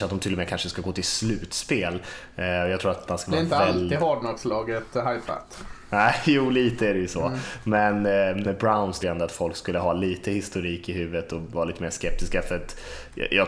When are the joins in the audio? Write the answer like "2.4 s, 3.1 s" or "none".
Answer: 8.4 s, 9.0 s

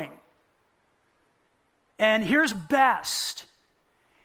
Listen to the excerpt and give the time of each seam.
2.5 s

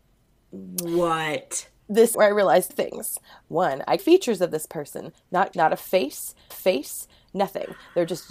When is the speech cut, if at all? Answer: 2.1 s, 2.7 s, 4.0 s, 5.5 s, 6.5 s

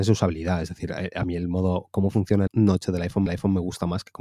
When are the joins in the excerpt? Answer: 2.5 s, 3.3 s

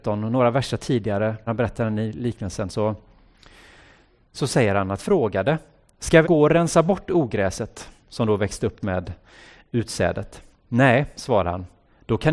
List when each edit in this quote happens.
1.5 s, 5.0 s, 6.2 s, 8.8 s

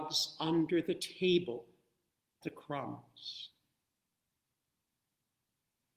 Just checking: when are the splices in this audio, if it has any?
2.4 s

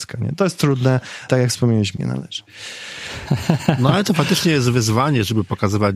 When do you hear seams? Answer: 1.3 s, 2.0 s

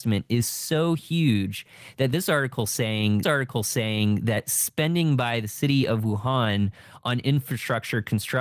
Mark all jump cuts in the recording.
3.2 s

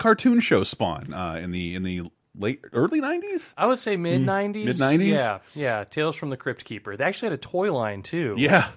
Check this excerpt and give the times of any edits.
none

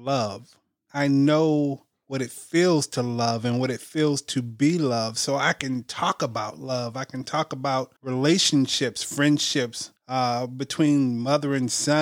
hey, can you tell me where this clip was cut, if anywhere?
8.0 s, 10.0 s

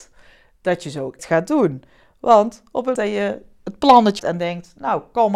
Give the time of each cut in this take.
1.2 s, 2.9 s, 4.2 s

